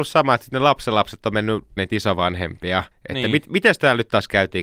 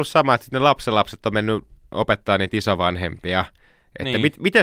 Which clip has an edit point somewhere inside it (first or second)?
first